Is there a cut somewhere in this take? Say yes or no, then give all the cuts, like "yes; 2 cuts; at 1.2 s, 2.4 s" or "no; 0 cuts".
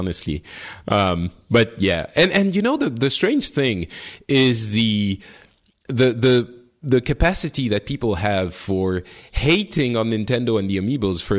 no; 0 cuts